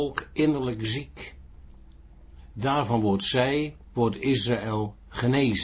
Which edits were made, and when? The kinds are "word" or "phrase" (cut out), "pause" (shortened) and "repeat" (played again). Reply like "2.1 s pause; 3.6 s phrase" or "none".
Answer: 3.8 s pause